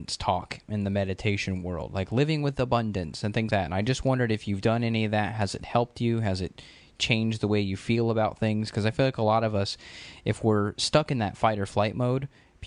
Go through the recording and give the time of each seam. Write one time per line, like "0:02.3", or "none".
0:03.5